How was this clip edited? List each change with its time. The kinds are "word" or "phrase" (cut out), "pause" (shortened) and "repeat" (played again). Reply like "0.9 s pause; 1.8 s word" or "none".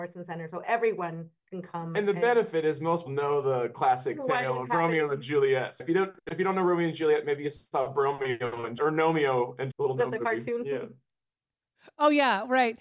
1.4 s pause; 3.1 s word; 5.8 s word; 8.8 s word; 9.7 s phrase